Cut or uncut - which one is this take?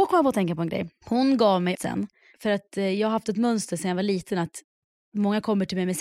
cut